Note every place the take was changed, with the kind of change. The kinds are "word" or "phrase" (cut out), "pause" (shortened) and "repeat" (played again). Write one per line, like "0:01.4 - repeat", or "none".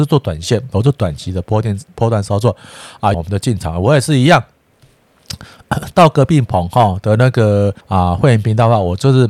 0:03.1 - phrase
0:07.8 - pause